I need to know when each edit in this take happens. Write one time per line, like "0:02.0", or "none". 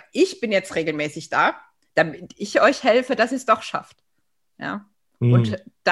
none